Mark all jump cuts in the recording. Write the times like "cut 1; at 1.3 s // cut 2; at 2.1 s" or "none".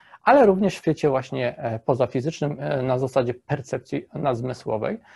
none